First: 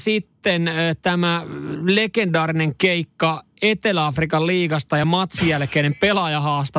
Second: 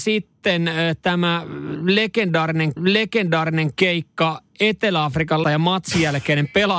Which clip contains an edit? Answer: second; 2 cuts; at 2.8 s, 5.4 s

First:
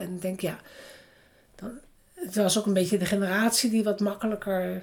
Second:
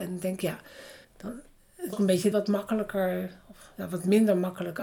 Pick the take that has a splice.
second; 3 cuts; at 1.0 s, 1.9 s, 2.3 s

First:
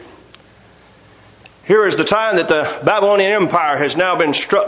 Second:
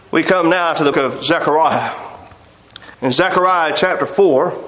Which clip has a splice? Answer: second; 2 cuts; at 0.9 s, 2.9 s

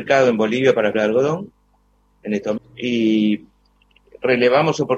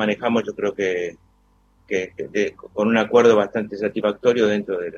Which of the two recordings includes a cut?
first; 2 cuts; at 0.9 s, 2.6 s

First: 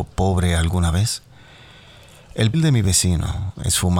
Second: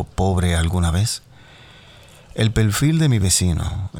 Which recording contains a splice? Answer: first; 1 cut; at 2.5 s

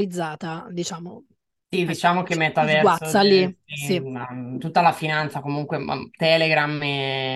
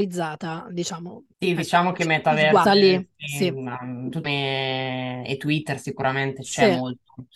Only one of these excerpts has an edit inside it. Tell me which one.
second; 3 cuts; at 1.3 s, 2.7 s, 4.2 s

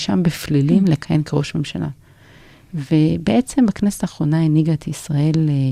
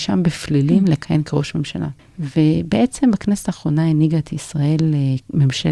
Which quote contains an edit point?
second; 1 cut; at 2.0 s

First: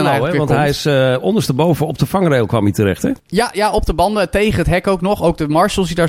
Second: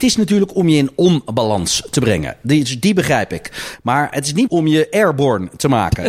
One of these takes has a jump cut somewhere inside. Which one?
second; 1 cut; at 4.5 s

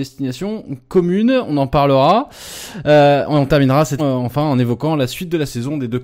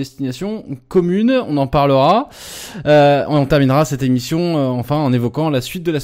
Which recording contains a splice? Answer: first; 1 cut; at 4.0 s

